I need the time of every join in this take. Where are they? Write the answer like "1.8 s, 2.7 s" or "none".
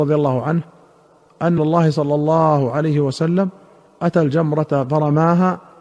1.6 s